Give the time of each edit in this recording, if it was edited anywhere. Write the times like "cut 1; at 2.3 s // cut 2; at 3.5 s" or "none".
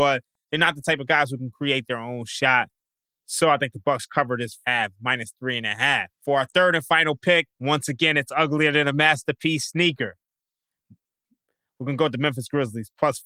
cut 1; at 4.6 s // cut 2; at 6.1 s // cut 3; at 7.5 s